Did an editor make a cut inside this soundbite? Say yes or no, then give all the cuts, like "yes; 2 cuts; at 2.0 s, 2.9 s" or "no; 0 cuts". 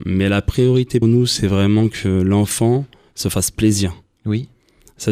yes; 1 cut; at 1.0 s